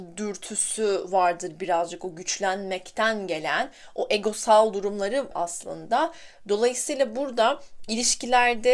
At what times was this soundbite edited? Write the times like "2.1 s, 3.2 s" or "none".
5.3 s